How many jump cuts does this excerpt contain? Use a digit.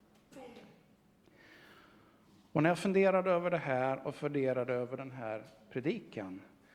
0